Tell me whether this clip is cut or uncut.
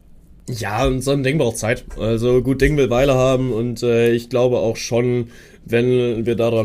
uncut